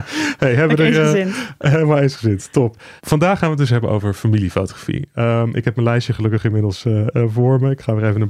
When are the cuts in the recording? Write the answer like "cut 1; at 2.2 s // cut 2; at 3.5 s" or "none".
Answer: cut 1; at 3.0 s